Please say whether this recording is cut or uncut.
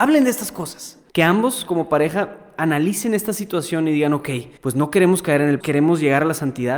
cut